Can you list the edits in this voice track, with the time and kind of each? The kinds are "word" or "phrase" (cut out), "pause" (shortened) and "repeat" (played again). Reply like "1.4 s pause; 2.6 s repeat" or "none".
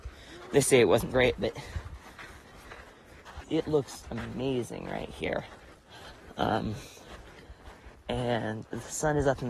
1.1 s word; 3.4 s word; 4.0 s word